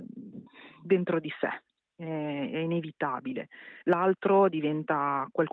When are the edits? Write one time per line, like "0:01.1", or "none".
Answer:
none